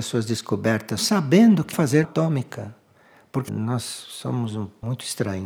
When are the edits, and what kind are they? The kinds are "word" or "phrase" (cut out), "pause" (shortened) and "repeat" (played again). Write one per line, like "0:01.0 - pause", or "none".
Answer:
0:01.0 - phrase
0:01.7 - word
0:02.0 - phrase
0:03.5 - word